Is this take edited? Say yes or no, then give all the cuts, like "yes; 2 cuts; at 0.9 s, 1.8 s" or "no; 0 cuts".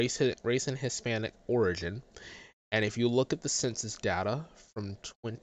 no; 0 cuts